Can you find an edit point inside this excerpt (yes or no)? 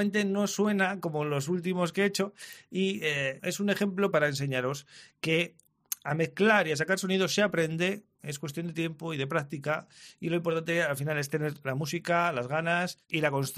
yes